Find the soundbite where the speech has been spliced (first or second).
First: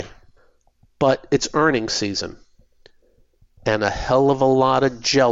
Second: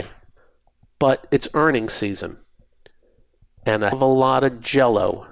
second